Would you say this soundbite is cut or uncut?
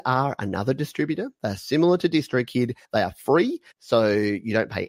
cut